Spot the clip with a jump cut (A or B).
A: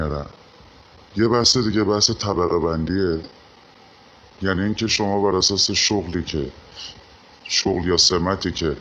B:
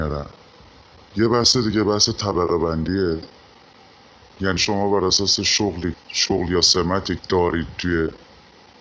B